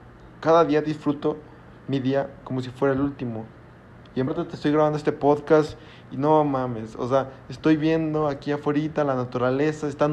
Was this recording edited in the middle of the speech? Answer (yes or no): yes